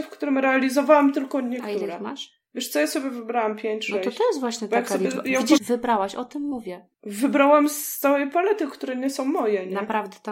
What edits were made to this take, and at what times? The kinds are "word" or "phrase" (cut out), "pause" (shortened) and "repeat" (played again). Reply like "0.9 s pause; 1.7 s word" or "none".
5.6 s word; 6.9 s pause